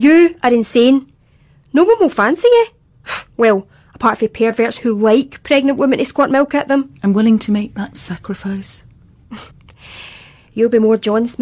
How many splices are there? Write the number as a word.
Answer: one